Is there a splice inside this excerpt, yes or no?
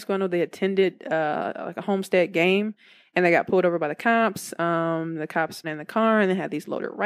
yes